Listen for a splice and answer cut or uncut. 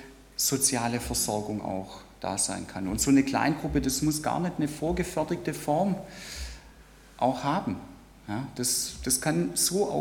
uncut